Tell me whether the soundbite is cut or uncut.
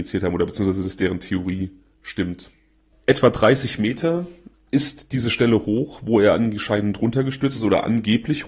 uncut